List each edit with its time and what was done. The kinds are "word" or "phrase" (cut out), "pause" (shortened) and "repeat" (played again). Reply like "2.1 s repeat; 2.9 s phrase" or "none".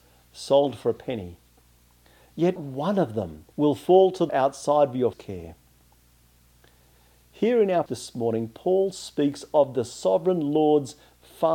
2.6 s word; 3.5 s pause; 4.3 s word; 5.1 s word; 7.9 s word

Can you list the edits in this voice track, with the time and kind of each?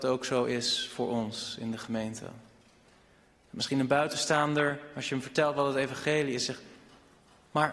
none

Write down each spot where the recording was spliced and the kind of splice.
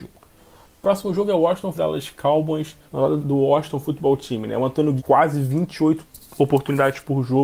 1.7 s phrase; 2.8 s pause; 3.2 s word; 5.0 s word

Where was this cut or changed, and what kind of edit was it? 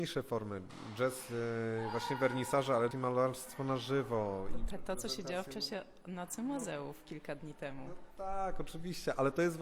2.9 s word; 4.7 s word

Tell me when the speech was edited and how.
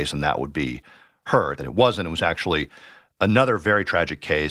1.6 s phrase

